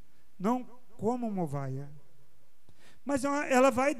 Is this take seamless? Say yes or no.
no